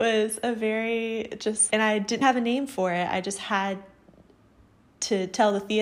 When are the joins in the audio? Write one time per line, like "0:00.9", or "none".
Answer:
0:01.7
0:02.2